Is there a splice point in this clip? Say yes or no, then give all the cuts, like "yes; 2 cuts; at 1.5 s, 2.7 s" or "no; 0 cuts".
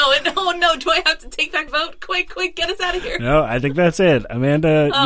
yes; 1 cut; at 1.7 s